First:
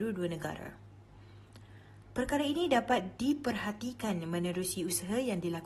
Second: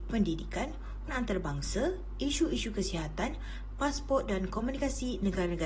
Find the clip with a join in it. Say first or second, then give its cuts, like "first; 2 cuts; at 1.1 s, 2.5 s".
second; 1 cut; at 1.1 s